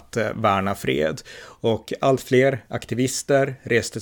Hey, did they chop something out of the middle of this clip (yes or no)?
no